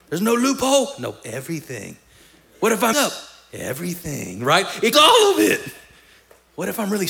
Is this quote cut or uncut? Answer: cut